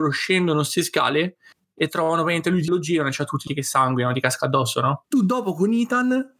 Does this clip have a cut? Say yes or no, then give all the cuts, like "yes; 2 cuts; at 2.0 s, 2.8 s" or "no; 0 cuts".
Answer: yes; 2 cuts; at 2.7 s, 3.5 s